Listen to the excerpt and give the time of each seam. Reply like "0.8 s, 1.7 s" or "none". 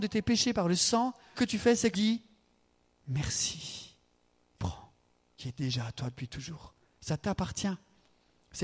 1.3 s, 1.9 s, 4.6 s, 5.4 s